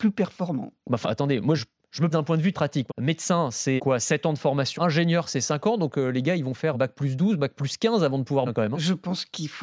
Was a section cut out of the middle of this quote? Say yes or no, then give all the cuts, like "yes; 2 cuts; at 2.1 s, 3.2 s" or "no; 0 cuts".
yes; 9 cuts; at 1.0 s, 1.6 s, 2.1 s, 2.5 s, 2.9 s, 3.8 s, 4.8 s, 6.7 s, 8.5 s